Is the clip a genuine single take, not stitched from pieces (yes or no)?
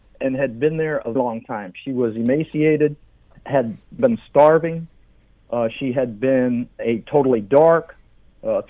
no